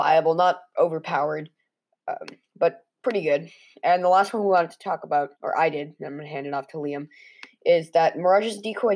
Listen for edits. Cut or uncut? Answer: cut